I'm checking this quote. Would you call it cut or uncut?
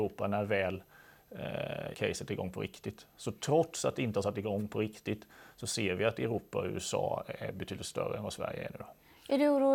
cut